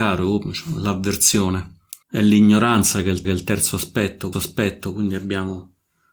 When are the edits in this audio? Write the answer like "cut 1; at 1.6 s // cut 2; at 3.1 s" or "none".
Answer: cut 1; at 2.0 s // cut 2; at 3.2 s // cut 3; at 4.3 s